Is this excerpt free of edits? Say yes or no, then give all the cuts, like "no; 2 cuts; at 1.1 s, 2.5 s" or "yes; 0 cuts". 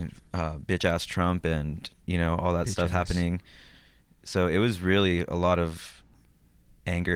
yes; 0 cuts